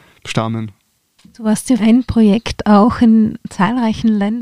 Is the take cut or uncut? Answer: cut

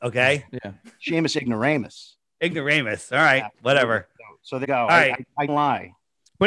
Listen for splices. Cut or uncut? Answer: cut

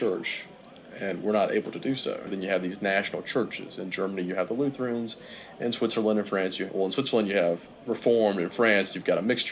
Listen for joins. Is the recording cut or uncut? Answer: cut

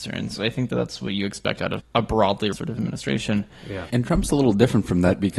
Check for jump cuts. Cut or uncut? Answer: cut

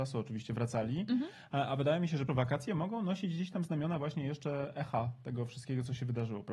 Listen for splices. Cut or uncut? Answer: cut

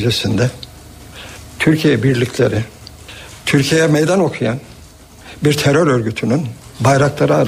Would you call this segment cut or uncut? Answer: uncut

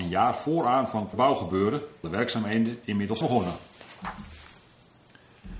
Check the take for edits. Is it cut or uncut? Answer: cut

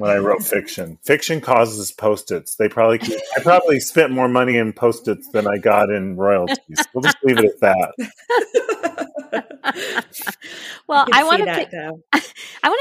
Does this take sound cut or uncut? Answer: uncut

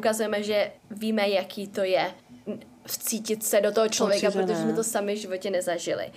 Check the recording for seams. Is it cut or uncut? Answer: uncut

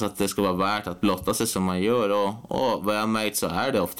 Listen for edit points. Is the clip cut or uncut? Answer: cut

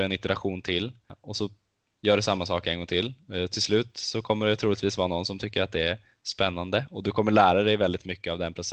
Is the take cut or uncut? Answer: uncut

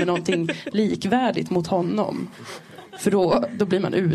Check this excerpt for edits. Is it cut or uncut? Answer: uncut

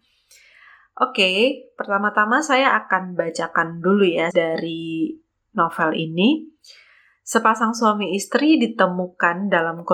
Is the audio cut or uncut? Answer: cut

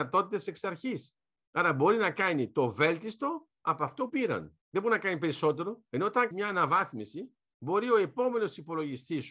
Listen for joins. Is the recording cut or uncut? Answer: cut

